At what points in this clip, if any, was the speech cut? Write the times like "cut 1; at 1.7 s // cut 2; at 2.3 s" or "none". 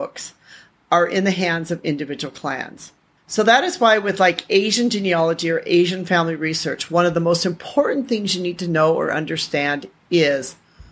none